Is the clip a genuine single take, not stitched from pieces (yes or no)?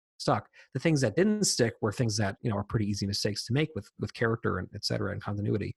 yes